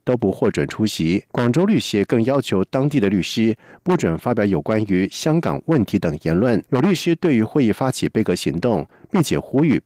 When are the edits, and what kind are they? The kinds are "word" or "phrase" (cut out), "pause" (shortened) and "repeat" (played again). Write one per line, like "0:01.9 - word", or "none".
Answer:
0:01.3 - pause
0:06.7 - pause